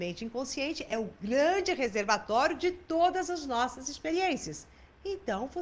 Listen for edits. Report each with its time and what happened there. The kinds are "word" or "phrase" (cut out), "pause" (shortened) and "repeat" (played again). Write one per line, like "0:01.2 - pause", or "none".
none